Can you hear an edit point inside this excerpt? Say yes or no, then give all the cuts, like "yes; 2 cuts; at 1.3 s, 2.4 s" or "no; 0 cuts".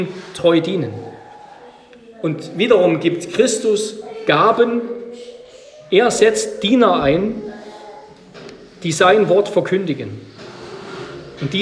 no; 0 cuts